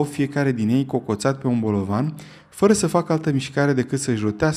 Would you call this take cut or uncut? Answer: uncut